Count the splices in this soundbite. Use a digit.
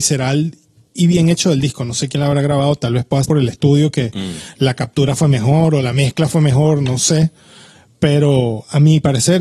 1